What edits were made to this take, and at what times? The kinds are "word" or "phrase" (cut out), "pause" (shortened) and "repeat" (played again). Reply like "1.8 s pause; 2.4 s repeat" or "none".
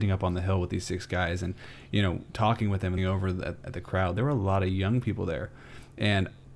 2.3 s pause; 3.0 s word

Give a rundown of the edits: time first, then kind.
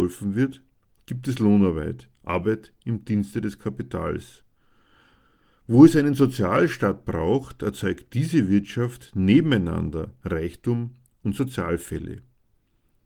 none

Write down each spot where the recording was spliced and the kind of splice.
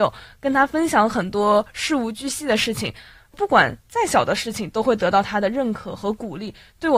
none

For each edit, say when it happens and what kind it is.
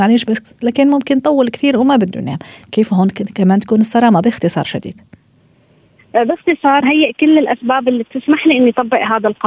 6.8 s word

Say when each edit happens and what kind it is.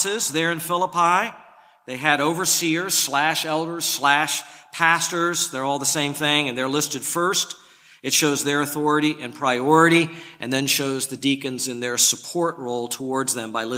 none

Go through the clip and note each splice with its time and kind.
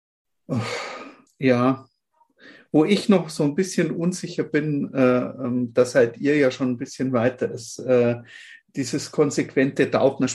1.3 s pause

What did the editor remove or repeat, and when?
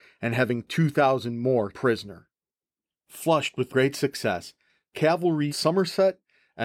1.7 s word; 3.7 s word; 5.5 s phrase

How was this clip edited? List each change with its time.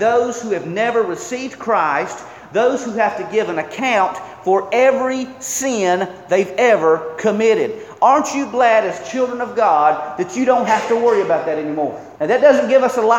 12.2 s pause

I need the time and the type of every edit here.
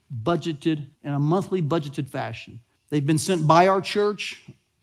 0.9 s pause; 2.8 s pause

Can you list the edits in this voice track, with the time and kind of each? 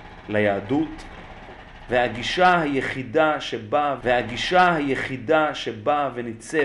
4.0 s repeat

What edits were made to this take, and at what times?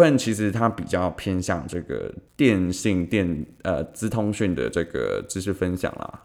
2.3 s pause

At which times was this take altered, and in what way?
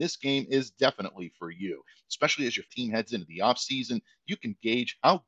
2.7 s word

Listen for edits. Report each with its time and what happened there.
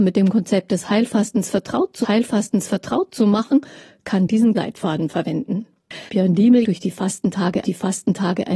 2.0 s repeat; 4.5 s phrase; 6.1 s pause; 6.6 s phrase; 7.6 s repeat

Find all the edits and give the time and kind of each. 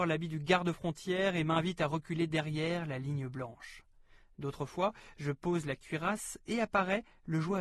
none

